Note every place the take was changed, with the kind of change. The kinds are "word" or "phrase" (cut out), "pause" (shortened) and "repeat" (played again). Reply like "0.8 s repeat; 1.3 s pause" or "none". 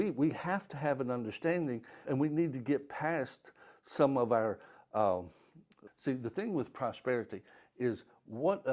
2.0 s word; 5.9 s word